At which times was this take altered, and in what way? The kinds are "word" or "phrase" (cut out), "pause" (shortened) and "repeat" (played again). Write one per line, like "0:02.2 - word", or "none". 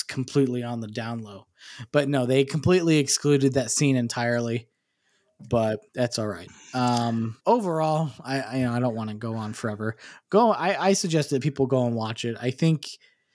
0:05.9 - pause
0:07.4 - pause